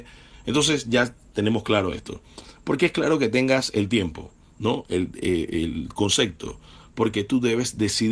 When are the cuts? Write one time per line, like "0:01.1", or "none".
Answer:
none